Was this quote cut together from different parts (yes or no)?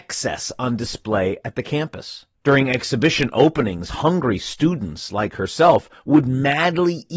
yes